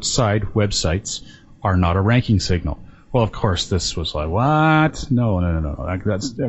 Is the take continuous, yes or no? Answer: yes